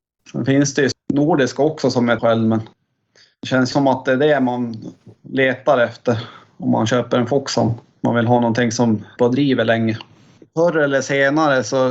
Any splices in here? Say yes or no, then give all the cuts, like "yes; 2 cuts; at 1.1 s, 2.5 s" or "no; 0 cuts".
yes; 4 cuts; at 0.9 s, 2.2 s, 3.7 s, 9.2 s